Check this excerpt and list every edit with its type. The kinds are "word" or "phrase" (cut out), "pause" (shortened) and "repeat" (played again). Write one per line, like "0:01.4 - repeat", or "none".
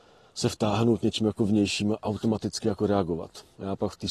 none